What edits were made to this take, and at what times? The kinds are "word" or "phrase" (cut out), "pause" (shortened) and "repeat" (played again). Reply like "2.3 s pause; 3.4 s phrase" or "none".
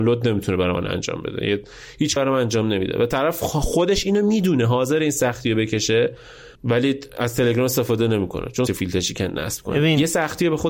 2.2 s word; 6.5 s pause; 8.7 s word